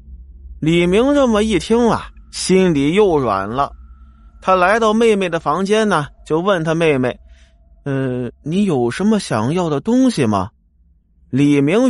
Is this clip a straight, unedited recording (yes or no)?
no